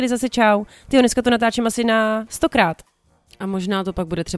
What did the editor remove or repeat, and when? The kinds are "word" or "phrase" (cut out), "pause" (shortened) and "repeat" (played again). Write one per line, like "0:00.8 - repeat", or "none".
none